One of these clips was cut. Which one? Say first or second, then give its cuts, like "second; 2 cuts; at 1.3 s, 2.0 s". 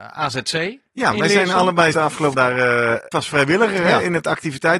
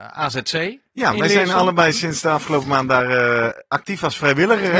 first; 3 cuts; at 1.9 s, 2.3 s, 3.1 s